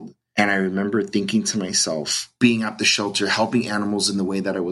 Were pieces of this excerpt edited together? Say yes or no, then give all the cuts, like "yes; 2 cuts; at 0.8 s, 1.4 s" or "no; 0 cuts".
no; 0 cuts